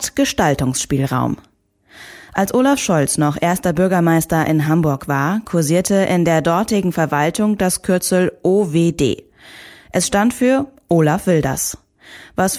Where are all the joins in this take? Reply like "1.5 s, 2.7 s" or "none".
none

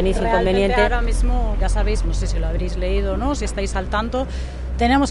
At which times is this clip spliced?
1.6 s, 2.0 s

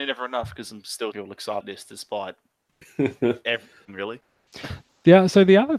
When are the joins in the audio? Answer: 1.1 s, 1.6 s, 3.8 s

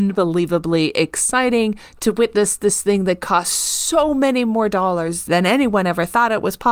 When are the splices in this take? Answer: 5.3 s

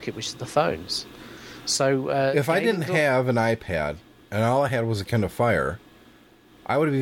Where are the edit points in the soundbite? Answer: none

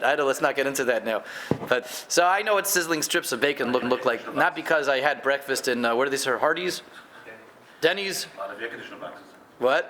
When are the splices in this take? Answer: 1.8 s, 3.8 s

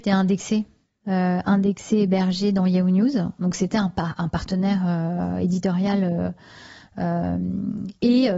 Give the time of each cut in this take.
none

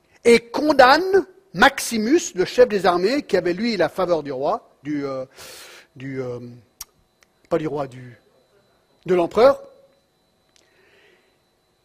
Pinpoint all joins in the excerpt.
4.8 s

